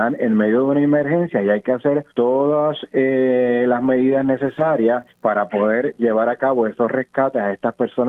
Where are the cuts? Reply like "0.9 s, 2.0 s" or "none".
2.1 s, 5.1 s